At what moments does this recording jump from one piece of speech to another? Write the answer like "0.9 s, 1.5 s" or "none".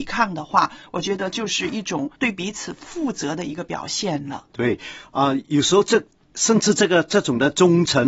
2.2 s, 4.5 s